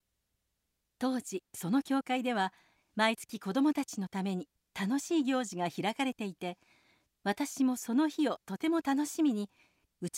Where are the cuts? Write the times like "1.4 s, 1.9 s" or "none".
none